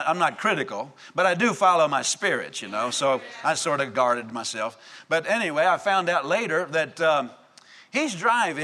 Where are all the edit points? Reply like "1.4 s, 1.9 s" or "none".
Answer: none